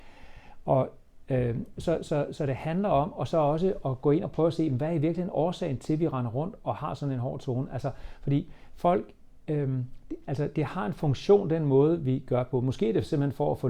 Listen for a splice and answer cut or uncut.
uncut